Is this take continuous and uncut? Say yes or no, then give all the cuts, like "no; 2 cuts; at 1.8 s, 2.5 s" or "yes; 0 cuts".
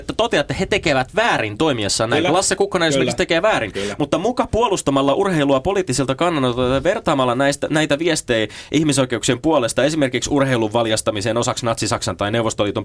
yes; 0 cuts